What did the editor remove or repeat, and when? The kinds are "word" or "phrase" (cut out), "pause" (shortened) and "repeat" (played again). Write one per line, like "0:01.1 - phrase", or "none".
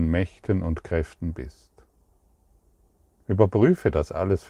none